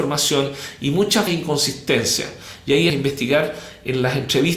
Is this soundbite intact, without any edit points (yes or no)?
no